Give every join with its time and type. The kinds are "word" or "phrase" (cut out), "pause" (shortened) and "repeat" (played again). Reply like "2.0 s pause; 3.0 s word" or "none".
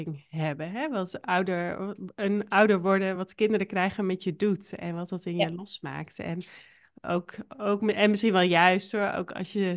none